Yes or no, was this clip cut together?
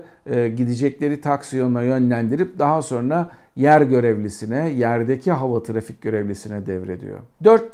no